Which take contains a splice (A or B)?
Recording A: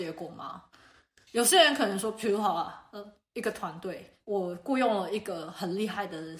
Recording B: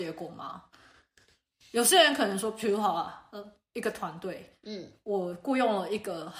A